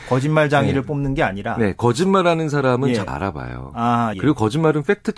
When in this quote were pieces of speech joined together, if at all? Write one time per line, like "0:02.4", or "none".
0:03.1
0:04.1